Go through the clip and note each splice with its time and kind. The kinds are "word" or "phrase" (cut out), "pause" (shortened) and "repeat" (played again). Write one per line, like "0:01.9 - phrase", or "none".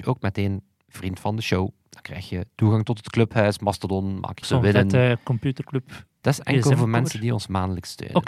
0:04.4 - phrase